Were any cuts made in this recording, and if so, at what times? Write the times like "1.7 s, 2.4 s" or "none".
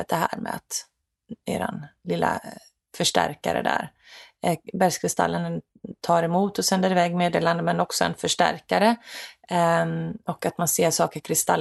none